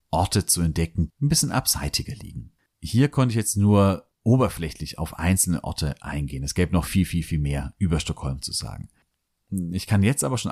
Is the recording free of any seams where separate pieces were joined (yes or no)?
no